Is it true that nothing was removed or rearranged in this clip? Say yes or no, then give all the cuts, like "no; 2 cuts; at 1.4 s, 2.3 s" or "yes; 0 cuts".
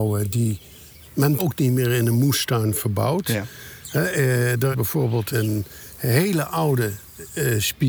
no; 4 cuts; at 1.0 s, 1.4 s, 4.7 s, 5.3 s